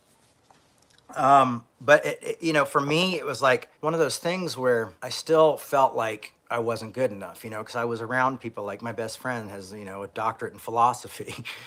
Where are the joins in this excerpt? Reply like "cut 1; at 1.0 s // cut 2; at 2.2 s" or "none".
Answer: cut 1; at 1.7 s // cut 2; at 3.7 s // cut 3; at 5.0 s // cut 4; at 6.4 s

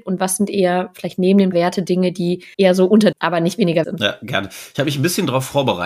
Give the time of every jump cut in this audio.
cut 1; at 1.5 s // cut 2; at 2.5 s // cut 3; at 3.1 s // cut 4; at 3.8 s

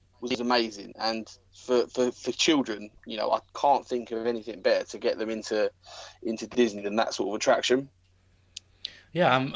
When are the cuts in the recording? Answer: cut 1; at 3.0 s

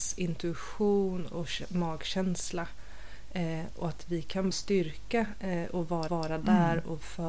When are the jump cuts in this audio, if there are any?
cut 1; at 4.5 s // cut 2; at 6.1 s

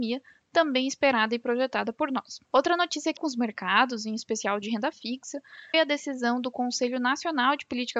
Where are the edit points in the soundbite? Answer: cut 1; at 2.4 s // cut 2; at 3.2 s // cut 3; at 5.7 s

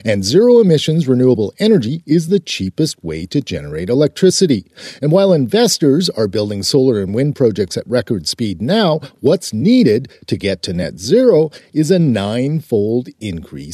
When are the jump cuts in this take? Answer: none

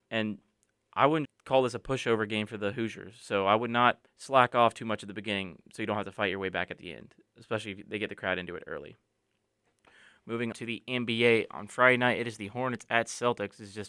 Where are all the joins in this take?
cut 1; at 1.2 s // cut 2; at 4.1 s // cut 3; at 10.5 s

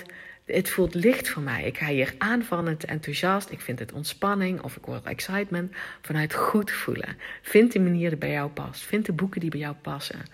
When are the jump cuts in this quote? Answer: none

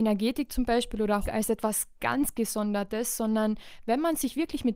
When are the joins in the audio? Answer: cut 1; at 1.3 s

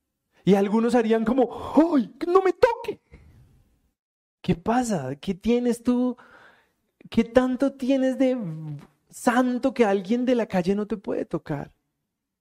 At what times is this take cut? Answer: none

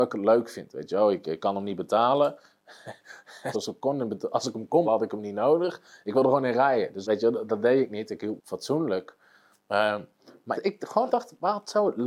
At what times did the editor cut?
cut 1; at 3.5 s // cut 2; at 4.9 s // cut 3; at 7.0 s // cut 4; at 8.4 s // cut 5; at 10.5 s // cut 6; at 11.1 s

